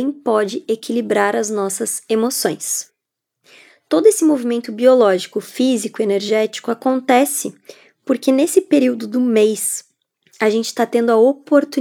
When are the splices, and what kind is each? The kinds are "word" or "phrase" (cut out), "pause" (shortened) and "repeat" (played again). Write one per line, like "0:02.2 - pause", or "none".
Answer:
none